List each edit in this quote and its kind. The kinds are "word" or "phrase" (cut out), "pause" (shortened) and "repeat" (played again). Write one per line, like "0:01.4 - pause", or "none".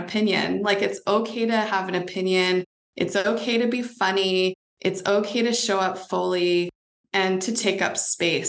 0:07.0 - pause